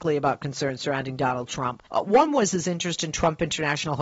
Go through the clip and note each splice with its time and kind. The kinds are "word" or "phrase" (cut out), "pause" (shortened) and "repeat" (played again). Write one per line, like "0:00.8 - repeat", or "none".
0:01.9 - pause